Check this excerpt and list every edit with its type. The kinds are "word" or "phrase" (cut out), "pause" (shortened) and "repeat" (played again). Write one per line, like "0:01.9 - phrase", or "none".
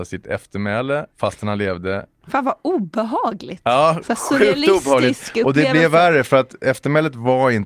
0:01.1 - pause